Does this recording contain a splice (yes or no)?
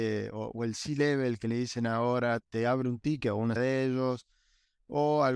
yes